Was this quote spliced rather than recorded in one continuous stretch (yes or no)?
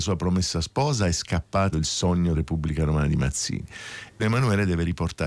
yes